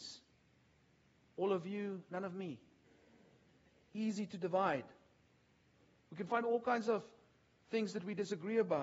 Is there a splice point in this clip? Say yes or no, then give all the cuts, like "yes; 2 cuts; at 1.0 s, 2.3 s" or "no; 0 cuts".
no; 0 cuts